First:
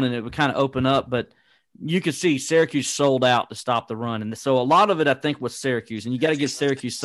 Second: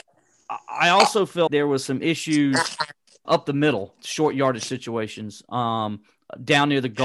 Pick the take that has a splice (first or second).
second